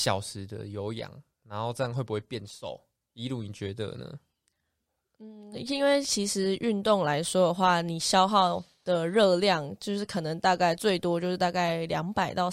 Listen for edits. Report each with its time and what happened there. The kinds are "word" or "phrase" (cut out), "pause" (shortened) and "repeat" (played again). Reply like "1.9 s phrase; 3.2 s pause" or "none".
none